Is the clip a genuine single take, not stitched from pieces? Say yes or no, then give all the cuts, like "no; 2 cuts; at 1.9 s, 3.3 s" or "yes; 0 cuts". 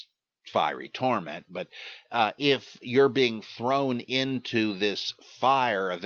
yes; 0 cuts